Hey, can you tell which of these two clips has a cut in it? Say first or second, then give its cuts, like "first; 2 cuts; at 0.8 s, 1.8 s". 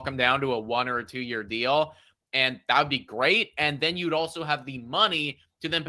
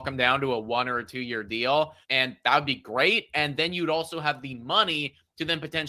second; 1 cut; at 2.0 s